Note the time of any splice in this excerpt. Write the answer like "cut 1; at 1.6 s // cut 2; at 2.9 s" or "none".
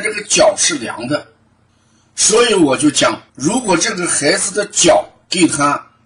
cut 1; at 1.7 s // cut 2; at 3.3 s